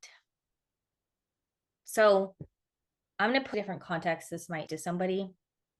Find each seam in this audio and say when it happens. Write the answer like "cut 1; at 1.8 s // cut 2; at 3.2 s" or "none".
cut 1; at 3.5 s // cut 2; at 4.7 s

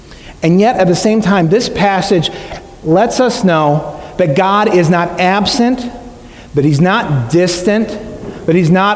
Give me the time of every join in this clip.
none

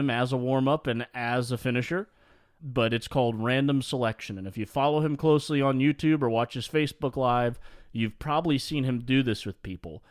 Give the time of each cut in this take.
cut 1; at 2.6 s

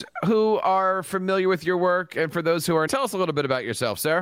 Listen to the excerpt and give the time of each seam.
cut 1; at 2.9 s

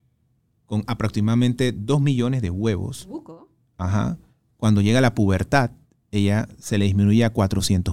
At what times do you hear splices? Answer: none

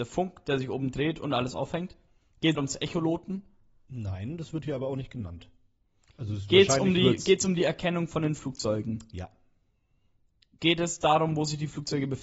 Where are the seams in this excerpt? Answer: cut 1; at 2.5 s

